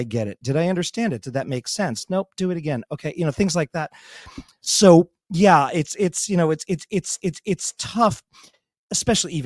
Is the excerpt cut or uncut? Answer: cut